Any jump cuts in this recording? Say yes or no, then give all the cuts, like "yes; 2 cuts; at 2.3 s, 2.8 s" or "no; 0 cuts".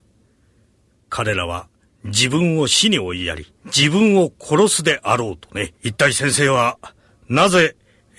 yes; 2 cuts; at 3.6 s, 5.8 s